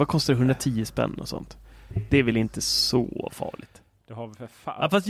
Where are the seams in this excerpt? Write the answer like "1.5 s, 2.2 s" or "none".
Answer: none